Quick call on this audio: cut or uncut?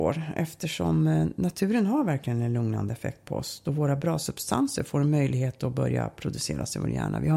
uncut